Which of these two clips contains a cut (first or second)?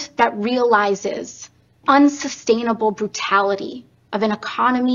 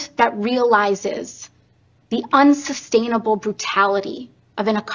first